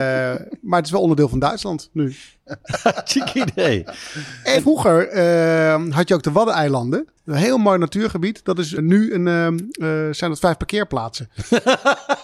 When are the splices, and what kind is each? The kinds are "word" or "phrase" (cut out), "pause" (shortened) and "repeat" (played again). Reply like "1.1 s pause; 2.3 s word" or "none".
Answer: 4.6 s word; 7.2 s pause